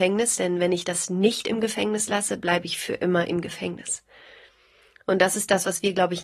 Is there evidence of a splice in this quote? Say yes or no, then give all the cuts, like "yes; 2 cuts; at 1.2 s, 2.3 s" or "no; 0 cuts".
no; 0 cuts